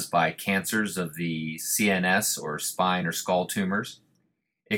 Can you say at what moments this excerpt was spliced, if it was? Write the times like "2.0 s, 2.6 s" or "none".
none